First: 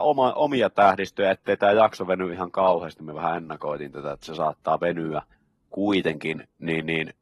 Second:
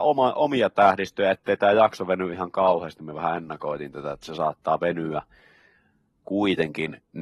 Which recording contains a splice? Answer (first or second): first